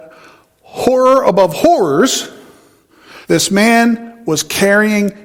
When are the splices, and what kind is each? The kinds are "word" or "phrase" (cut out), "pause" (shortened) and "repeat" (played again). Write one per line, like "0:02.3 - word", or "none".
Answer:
0:03.2 - pause